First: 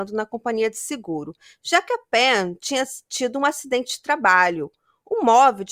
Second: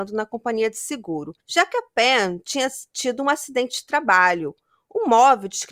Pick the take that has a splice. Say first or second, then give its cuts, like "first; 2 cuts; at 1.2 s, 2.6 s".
second; 1 cut; at 1.4 s